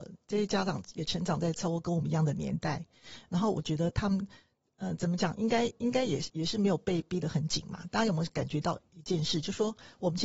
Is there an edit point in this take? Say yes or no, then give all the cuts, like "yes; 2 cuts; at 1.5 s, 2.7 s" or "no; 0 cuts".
no; 0 cuts